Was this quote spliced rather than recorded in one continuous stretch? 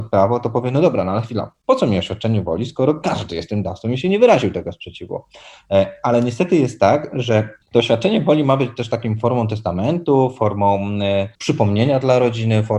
yes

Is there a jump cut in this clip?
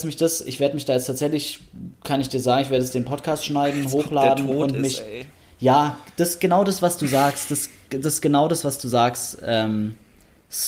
no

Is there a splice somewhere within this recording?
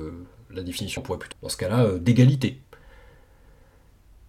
yes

